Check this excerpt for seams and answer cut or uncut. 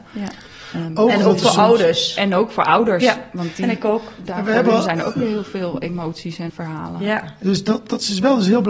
cut